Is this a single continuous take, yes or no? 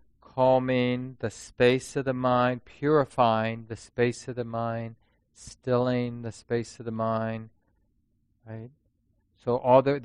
yes